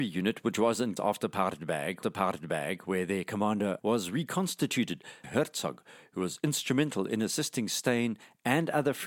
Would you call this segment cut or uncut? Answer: cut